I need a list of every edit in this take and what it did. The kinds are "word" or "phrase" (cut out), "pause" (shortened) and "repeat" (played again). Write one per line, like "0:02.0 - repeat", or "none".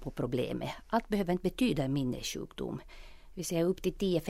none